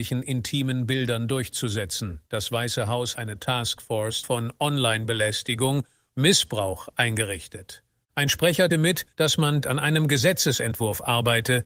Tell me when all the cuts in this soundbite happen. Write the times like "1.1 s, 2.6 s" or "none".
2.3 s, 3.1 s, 4.2 s, 6.1 s, 7.9 s, 8.7 s, 9.1 s, 9.6 s